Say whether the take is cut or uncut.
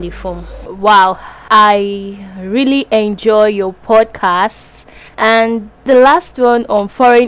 uncut